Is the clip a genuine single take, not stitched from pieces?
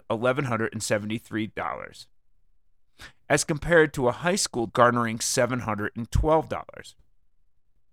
no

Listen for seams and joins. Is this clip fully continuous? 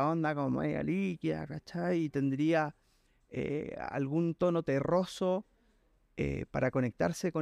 yes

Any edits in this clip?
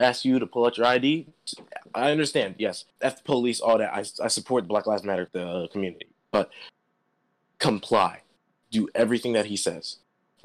yes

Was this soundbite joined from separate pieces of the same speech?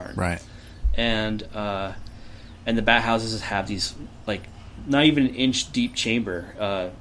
no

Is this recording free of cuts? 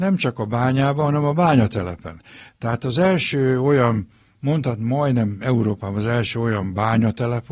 yes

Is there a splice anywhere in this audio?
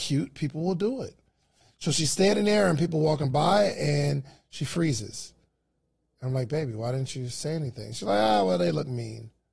no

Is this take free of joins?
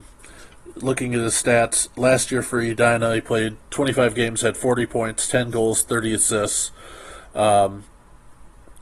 no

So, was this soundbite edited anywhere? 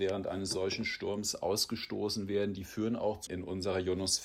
yes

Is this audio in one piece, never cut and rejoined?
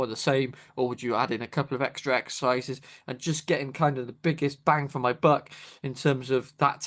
yes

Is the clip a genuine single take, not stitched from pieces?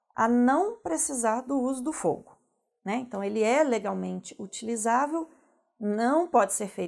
yes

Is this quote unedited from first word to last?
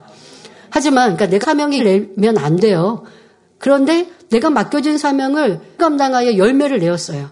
no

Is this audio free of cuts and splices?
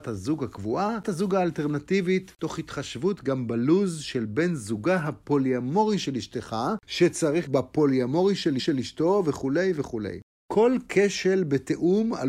no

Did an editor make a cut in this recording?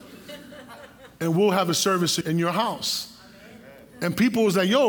yes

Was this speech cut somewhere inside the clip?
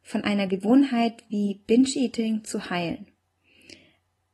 no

